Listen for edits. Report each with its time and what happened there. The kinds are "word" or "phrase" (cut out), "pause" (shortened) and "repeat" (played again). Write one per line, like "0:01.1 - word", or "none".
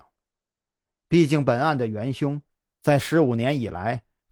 none